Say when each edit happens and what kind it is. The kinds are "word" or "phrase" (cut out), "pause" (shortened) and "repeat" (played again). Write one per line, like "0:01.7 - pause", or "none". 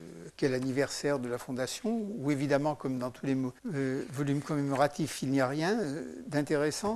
0:03.6 - pause